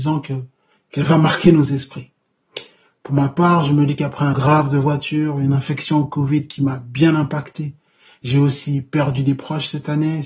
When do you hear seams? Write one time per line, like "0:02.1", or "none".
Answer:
0:04.3